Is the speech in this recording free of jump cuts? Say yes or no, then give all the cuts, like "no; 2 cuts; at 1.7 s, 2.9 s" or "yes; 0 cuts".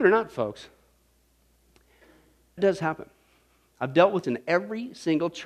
no; 2 cuts; at 2.6 s, 4.2 s